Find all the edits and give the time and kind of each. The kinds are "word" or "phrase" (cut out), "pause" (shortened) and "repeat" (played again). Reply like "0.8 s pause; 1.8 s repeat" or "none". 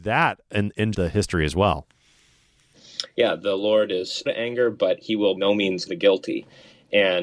0.9 s word; 4.3 s word; 5.4 s word; 5.9 s word